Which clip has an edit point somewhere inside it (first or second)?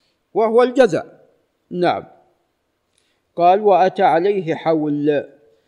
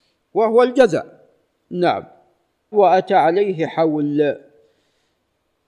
second